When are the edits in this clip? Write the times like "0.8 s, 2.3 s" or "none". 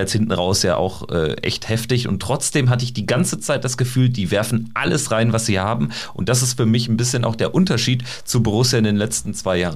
none